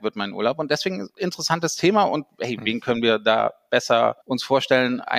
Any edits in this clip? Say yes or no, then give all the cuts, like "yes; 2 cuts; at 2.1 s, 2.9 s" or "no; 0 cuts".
yes; 1 cut; at 4.2 s